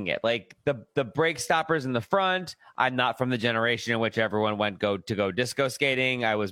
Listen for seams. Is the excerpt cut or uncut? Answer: uncut